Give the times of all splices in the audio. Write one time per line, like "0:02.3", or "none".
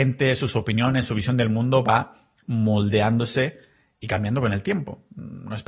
none